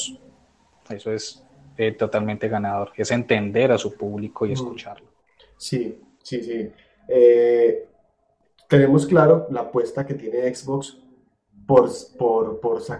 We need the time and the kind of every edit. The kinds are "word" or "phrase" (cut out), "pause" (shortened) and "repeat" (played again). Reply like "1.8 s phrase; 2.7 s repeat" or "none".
none